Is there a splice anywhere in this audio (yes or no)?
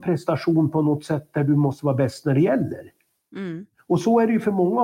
no